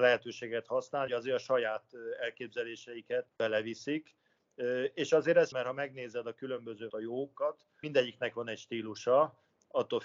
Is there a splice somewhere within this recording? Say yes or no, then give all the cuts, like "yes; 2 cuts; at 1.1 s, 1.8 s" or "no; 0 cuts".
yes; 5 cuts; at 1.1 s, 3.3 s, 5.5 s, 6.9 s, 7.8 s